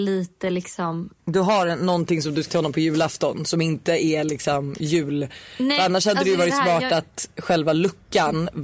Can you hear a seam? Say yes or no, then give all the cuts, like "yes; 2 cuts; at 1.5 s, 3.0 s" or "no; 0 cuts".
yes; 1 cut; at 2.5 s